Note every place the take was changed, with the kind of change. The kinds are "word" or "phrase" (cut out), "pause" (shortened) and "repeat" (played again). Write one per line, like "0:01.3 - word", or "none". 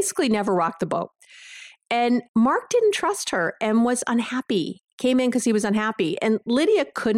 0:02.3 - pause